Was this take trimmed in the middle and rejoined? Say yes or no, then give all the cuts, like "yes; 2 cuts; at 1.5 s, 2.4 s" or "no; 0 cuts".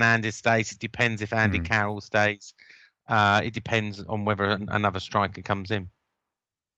yes; 1 cut; at 4.1 s